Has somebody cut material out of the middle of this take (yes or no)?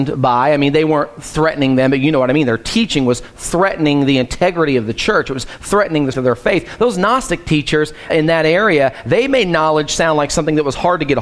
yes